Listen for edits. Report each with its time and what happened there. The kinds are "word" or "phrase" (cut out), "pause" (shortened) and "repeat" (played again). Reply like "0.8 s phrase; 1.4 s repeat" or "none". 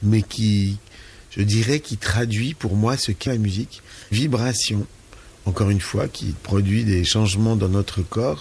3.3 s word; 4.1 s word; 6.4 s word